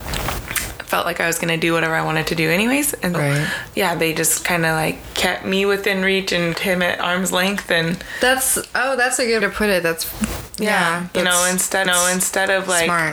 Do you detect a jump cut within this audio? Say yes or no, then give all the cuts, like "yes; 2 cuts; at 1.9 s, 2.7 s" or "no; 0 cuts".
yes; 4 cuts; at 3.1 s, 6.5 s, 9.4 s, 11.9 s